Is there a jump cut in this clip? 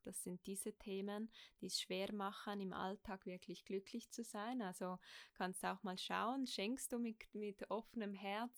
no; 0 cuts

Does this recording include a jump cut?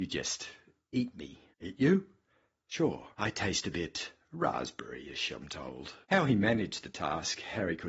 yes; 3 cuts; at 1.5 s, 3.1 s, 6.0 s

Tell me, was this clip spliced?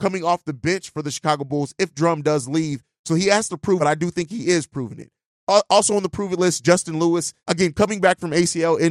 yes; 2 cuts; at 3.8 s, 7.4 s

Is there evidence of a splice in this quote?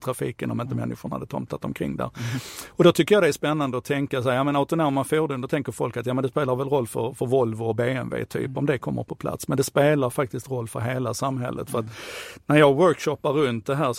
no; 0 cuts

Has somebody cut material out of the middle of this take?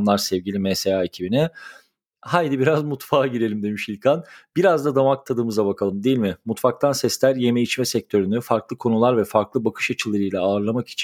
no; 0 cuts

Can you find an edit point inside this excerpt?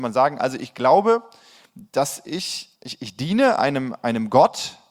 yes; 1 cut; at 2.7 s

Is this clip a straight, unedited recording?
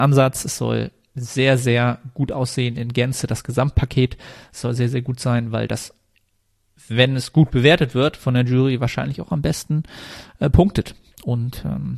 yes; 0 cuts

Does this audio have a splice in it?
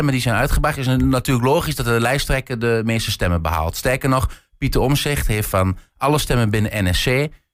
no; 0 cuts

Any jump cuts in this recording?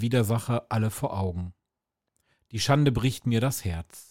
no; 0 cuts

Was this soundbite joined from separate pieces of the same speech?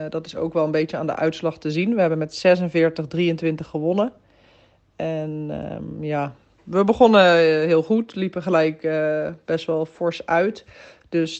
no; 0 cuts

